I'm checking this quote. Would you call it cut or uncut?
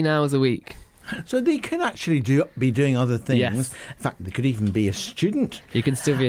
uncut